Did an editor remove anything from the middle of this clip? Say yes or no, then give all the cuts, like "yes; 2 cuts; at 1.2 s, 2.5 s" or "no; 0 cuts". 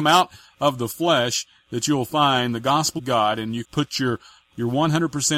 yes; 2 cuts; at 3.0 s, 3.6 s